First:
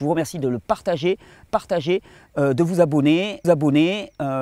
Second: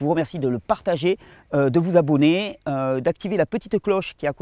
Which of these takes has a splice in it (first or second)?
first